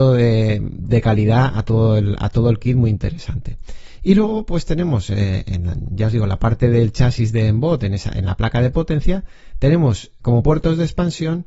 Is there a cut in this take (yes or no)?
yes